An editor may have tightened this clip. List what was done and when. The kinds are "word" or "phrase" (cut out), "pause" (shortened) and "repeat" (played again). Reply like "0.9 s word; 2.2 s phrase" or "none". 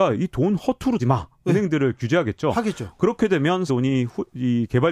1.0 s word; 3.7 s word